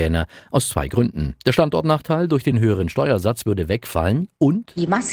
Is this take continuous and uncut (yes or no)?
yes